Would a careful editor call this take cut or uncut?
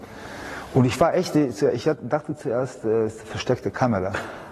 uncut